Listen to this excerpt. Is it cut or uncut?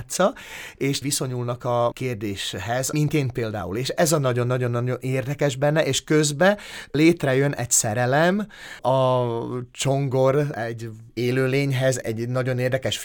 cut